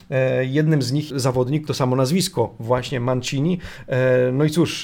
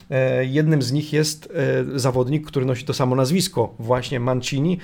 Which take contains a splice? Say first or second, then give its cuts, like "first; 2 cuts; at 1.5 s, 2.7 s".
first; 2 cuts; at 1.1 s, 1.7 s